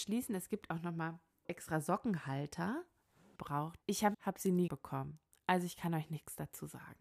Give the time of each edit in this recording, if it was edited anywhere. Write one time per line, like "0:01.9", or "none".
0:01.4
0:03.4
0:03.8
0:04.1
0:04.7